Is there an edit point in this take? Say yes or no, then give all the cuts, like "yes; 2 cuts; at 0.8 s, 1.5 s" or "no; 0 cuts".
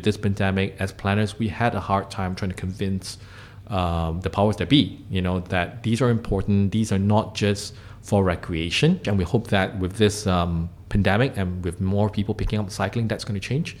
no; 0 cuts